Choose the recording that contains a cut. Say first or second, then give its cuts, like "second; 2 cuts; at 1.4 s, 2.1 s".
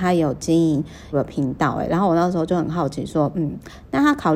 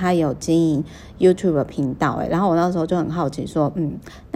first; 1 cut; at 1.1 s